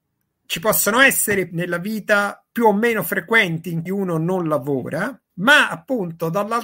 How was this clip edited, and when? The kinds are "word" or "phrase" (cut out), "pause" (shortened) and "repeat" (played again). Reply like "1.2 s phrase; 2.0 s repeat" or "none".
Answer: 1.5 s word; 2.5 s pause; 3.9 s word; 5.3 s pause